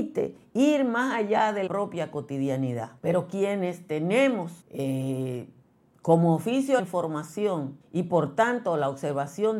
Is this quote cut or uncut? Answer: cut